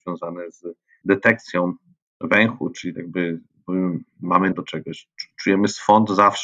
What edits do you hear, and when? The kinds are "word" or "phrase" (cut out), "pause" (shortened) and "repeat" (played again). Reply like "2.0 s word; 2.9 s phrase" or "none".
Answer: 1.0 s word; 2.9 s word; 4.5 s word